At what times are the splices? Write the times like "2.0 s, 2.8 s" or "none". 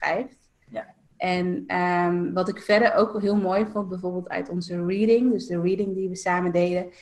1.1 s